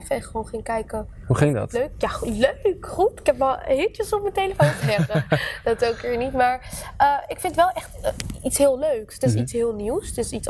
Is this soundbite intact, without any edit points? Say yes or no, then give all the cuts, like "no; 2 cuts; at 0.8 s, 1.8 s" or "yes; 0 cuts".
yes; 0 cuts